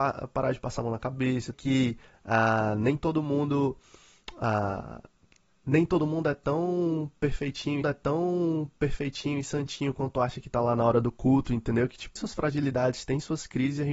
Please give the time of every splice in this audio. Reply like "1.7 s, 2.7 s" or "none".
1.5 s, 7.8 s, 12.2 s

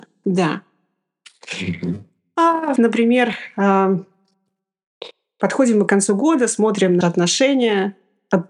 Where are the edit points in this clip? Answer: 2.8 s, 7.0 s

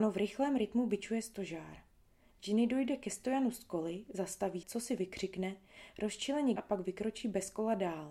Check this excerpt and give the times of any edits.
4.6 s, 6.6 s

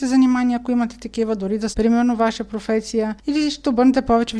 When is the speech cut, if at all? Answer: 1.7 s

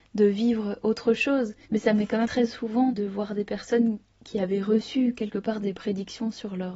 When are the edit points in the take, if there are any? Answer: 1.6 s, 2.2 s, 2.9 s

